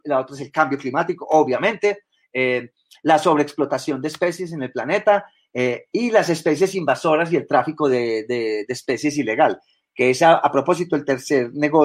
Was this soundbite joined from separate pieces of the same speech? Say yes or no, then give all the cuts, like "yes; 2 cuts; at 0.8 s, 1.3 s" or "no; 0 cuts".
no; 0 cuts